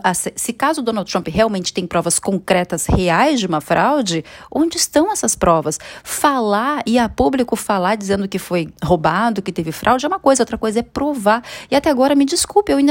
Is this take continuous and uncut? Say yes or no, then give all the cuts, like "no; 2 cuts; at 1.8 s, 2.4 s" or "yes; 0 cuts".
no; 1 cut; at 8.8 s